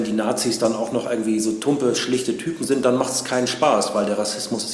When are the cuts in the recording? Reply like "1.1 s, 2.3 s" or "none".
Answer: none

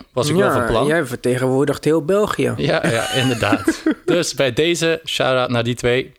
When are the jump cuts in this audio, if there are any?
2.8 s

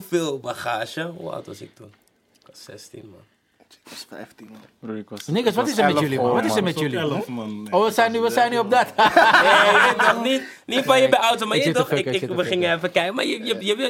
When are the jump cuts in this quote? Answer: none

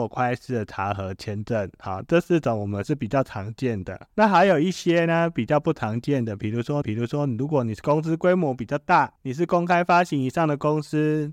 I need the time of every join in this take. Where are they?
4.1 s, 6.8 s, 9.2 s

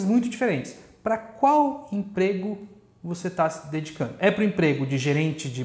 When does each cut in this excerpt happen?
none

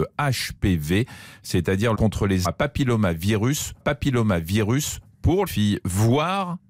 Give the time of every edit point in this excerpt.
1.9 s, 2.4 s, 3.8 s, 5.5 s

